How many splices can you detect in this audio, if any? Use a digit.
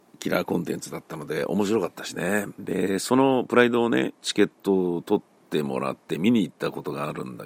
2